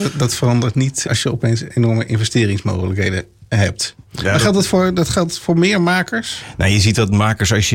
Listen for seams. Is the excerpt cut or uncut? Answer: cut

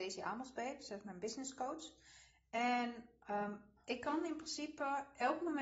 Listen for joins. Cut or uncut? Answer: uncut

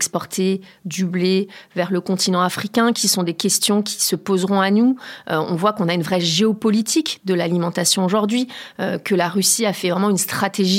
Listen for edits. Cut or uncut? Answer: uncut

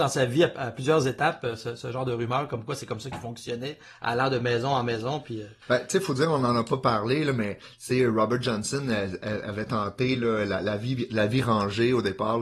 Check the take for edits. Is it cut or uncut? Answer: cut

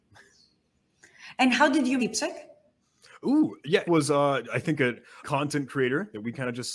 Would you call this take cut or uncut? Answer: cut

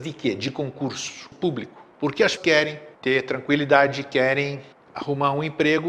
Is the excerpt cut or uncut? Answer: cut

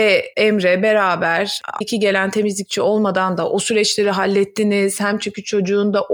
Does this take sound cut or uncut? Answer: cut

